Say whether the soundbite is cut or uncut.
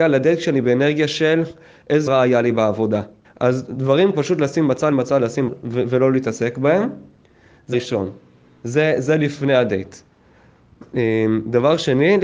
cut